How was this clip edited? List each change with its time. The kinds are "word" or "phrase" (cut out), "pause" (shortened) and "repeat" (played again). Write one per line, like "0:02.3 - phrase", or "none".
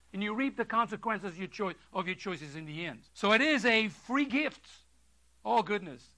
0:03.1 - pause